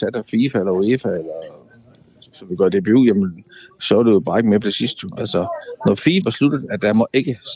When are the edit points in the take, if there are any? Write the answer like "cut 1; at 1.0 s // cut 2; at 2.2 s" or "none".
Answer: cut 1; at 4.6 s // cut 2; at 6.2 s